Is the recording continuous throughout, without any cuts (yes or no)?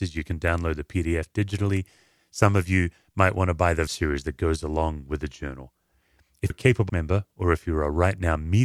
no